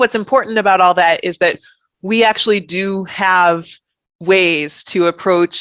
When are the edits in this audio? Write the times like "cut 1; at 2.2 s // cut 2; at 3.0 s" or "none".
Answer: none